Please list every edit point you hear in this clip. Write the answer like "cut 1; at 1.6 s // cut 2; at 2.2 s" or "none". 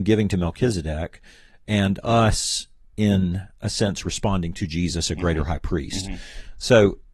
none